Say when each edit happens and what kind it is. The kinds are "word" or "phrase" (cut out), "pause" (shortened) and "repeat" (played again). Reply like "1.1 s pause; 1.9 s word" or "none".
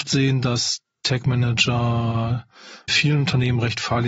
2.9 s word